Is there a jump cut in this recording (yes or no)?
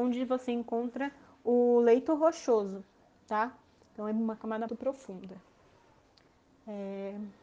yes